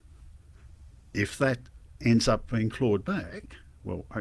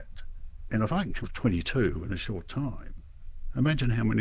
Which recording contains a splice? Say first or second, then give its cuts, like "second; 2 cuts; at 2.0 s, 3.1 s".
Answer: second; 1 cut; at 1.2 s